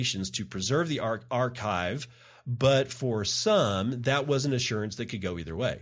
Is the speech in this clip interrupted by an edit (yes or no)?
no